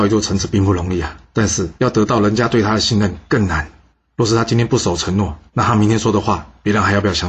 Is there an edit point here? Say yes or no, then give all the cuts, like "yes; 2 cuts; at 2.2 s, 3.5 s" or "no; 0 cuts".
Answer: yes; 4 cuts; at 1.2 s, 1.8 s, 3.9 s, 5.5 s